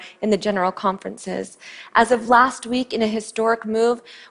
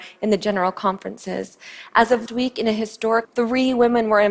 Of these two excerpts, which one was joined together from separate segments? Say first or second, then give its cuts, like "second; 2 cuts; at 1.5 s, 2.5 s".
second; 2 cuts; at 2.3 s, 3.2 s